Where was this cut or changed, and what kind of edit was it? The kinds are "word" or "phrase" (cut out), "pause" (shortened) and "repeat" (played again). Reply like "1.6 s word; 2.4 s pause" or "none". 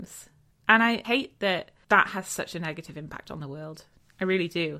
none